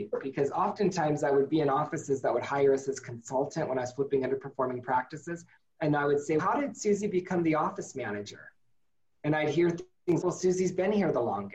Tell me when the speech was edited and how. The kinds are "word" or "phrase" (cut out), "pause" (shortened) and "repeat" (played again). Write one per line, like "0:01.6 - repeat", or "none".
0:06.4 - word
0:10.2 - word